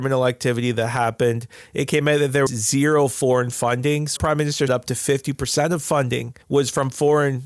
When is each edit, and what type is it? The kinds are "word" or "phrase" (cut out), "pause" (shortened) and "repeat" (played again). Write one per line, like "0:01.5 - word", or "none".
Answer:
0:02.5 - word
0:04.2 - word
0:04.7 - word
0:06.4 - pause